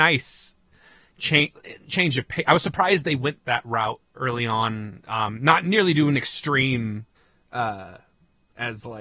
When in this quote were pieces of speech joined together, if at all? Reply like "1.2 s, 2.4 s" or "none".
7.2 s